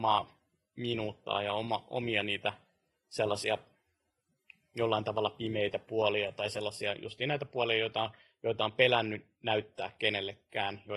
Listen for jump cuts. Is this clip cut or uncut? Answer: uncut